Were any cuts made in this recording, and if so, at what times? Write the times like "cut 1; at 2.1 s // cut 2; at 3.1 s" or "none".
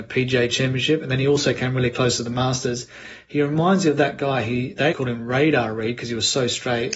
cut 1; at 4.9 s